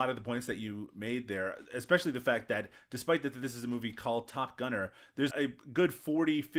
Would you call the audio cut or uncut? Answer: cut